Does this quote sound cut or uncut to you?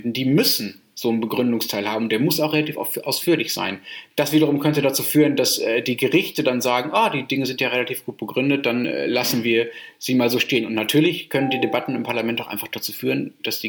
uncut